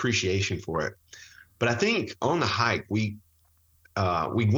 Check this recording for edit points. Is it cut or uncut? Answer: uncut